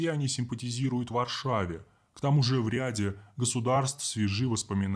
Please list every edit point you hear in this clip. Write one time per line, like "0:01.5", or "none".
none